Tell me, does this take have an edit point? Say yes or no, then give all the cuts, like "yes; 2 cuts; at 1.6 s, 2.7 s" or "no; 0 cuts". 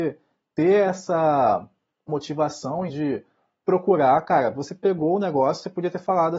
yes; 2 cuts; at 2.1 s, 2.9 s